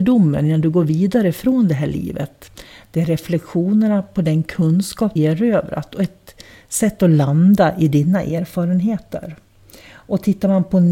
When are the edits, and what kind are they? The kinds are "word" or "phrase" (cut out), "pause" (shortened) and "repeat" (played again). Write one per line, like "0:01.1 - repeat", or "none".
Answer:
0:05.2 - word